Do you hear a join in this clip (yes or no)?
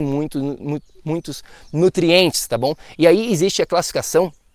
no